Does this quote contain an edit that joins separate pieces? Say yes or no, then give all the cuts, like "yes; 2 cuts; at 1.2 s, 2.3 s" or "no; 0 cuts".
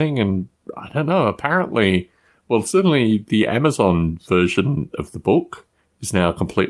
no; 0 cuts